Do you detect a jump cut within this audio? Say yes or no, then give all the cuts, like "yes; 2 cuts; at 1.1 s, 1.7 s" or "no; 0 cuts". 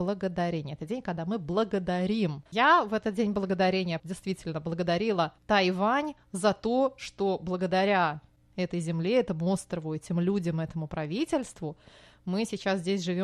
yes; 3 cuts; at 2.5 s, 4.0 s, 5.4 s